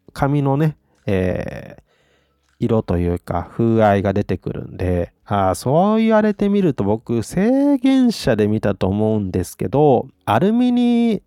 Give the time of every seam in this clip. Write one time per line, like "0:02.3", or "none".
0:05.2
0:10.1

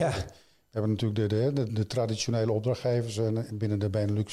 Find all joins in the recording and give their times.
0:01.7

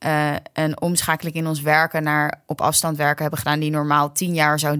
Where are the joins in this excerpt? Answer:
none

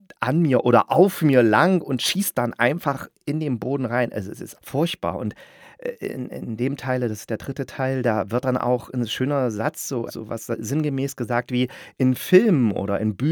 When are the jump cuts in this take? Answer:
0:04.5
0:10.1

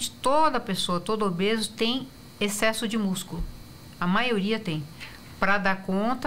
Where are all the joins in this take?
none

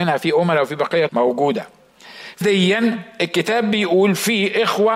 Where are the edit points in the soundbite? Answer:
0:01.1
0:02.4

